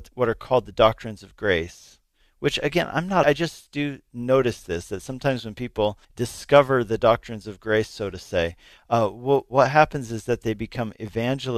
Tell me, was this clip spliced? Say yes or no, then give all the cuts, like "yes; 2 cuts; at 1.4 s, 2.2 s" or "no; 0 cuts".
yes; 2 cuts; at 3.2 s, 6.0 s